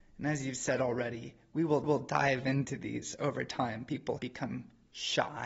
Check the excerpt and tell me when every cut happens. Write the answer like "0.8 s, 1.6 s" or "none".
1.8 s, 4.2 s